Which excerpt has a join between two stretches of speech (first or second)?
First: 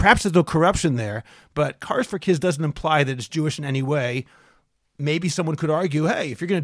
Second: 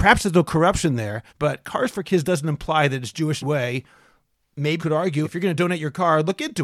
second